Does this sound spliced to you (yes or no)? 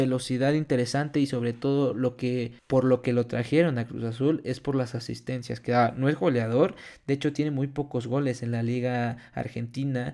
yes